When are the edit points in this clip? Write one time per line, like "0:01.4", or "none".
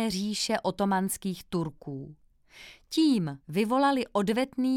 0:03.4